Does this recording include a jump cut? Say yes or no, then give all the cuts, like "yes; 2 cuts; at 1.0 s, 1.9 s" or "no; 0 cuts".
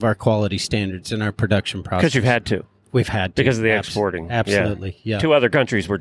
no; 0 cuts